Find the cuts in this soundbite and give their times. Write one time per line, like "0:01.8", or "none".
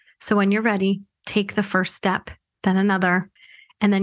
none